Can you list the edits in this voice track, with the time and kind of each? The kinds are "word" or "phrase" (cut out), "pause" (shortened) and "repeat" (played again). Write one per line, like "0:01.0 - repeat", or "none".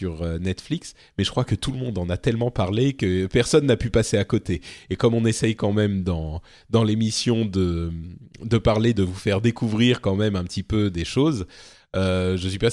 none